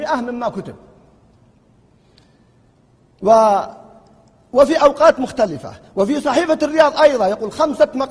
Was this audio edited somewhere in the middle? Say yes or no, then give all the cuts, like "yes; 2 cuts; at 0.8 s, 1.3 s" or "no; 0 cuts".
no; 0 cuts